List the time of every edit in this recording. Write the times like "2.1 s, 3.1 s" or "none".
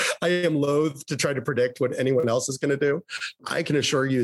none